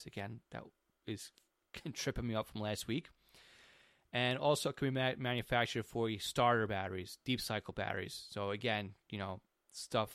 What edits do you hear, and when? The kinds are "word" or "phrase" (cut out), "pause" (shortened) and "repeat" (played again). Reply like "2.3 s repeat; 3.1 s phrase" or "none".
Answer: none